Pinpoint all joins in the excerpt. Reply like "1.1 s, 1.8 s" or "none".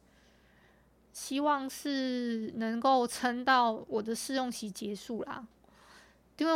none